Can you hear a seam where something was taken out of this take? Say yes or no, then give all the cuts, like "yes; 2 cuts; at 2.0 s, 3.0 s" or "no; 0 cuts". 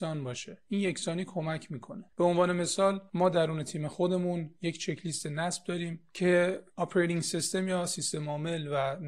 yes; 1 cut; at 2.1 s